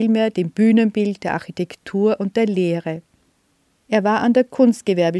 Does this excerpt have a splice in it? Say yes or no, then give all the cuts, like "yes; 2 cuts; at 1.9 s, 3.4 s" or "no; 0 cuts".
no; 0 cuts